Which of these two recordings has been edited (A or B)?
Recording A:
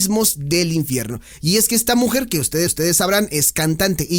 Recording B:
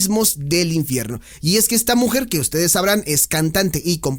A